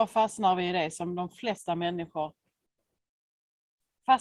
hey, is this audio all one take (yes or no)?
yes